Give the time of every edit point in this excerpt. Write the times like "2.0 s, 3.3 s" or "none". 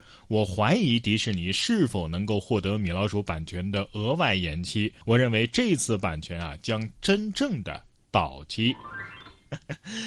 5.0 s